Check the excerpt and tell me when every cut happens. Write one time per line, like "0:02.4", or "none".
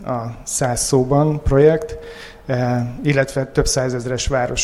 none